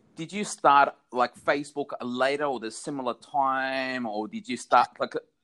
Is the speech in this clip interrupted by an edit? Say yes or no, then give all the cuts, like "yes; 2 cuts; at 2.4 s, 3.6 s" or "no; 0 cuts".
no; 0 cuts